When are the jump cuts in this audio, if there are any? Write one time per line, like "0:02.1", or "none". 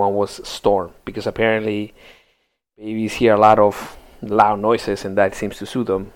none